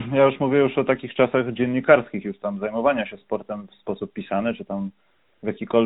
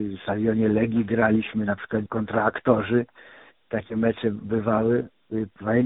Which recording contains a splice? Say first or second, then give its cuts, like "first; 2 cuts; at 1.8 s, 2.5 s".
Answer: second; 1 cut; at 2.1 s